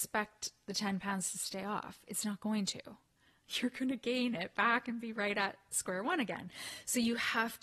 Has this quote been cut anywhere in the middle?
no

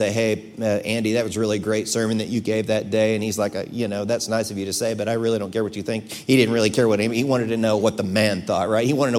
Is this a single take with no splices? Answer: yes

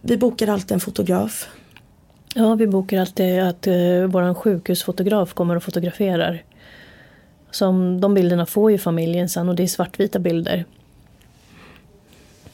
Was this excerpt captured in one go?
yes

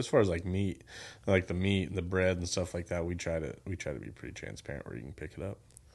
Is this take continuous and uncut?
yes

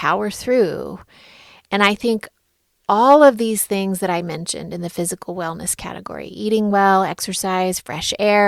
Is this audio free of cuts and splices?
yes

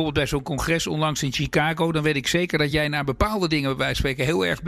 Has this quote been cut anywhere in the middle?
no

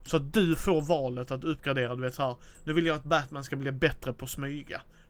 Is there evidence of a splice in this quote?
no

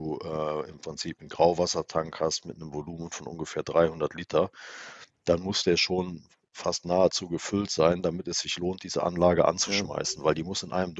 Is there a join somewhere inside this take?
no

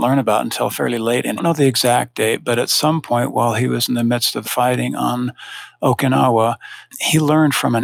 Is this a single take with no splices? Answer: no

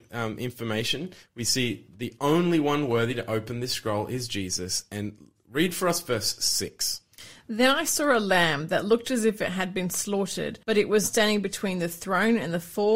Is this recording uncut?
no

